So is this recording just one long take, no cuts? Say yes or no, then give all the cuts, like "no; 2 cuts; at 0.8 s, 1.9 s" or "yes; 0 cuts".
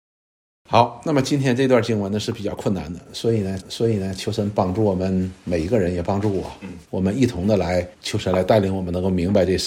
no; 3 cuts; at 3.6 s, 6.8 s, 7.9 s